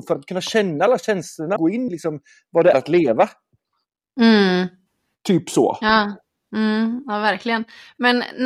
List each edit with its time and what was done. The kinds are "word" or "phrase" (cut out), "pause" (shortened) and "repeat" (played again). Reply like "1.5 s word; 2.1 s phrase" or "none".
1.6 s word; 1.9 s word; 2.7 s word